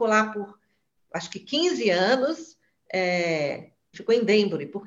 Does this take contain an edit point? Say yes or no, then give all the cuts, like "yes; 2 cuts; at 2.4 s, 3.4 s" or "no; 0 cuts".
yes; 1 cut; at 3.9 s